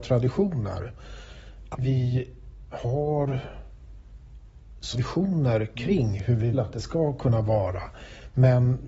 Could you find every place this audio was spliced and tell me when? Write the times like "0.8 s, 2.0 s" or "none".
1.7 s, 4.9 s, 6.5 s